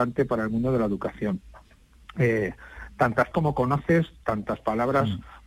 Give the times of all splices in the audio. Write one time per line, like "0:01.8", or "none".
0:03.3

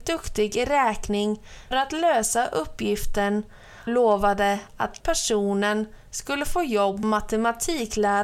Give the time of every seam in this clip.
0:01.7
0:03.9
0:05.0
0:07.0

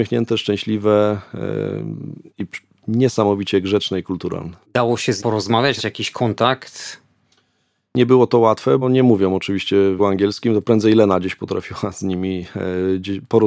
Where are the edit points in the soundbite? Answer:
0:02.3
0:04.6
0:05.2
0:05.8
0:08.8
0:10.0

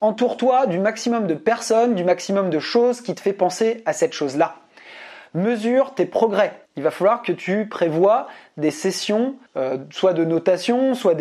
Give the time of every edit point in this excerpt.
0:06.6
0:09.5

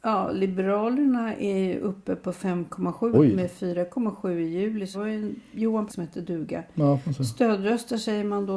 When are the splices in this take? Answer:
0:03.1
0:04.9
0:05.9

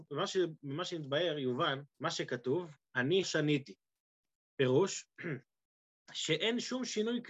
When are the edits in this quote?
0:01.9
0:03.2

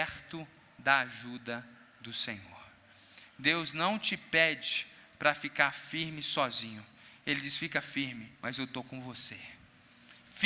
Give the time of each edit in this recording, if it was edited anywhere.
0:08.4

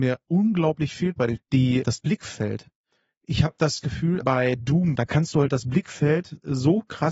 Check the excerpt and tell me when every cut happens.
0:01.4
0:04.2
0:05.0

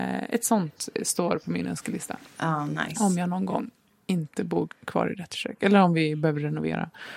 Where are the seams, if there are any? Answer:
none

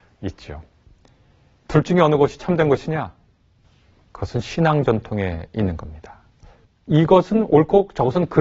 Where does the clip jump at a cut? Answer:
none

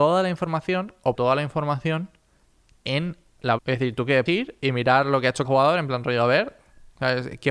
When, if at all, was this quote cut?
0:01.1
0:03.6
0:04.3
0:05.4

